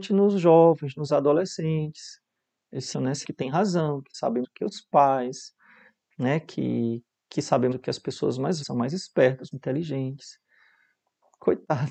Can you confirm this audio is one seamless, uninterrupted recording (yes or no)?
no